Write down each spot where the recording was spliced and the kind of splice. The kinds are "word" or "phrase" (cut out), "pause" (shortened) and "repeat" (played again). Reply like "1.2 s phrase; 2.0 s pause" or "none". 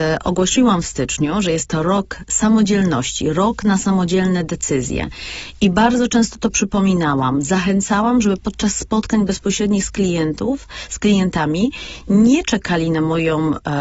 none